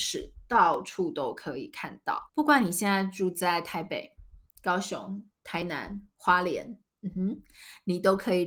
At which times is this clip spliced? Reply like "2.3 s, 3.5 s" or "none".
2.3 s